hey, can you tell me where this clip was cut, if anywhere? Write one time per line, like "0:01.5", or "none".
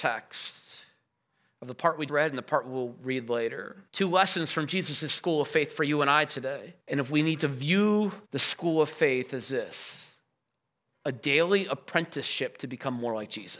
0:02.1
0:03.9
0:06.8
0:08.2